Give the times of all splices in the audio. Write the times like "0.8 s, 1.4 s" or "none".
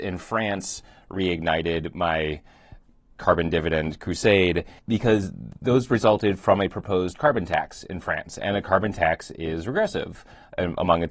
4.8 s